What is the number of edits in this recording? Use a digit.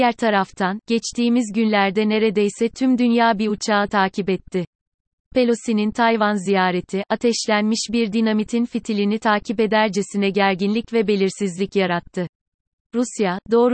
0